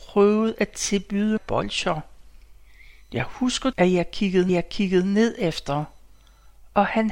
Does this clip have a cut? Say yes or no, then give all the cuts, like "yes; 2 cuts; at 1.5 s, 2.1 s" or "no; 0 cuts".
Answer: yes; 3 cuts; at 1.4 s, 3.7 s, 4.5 s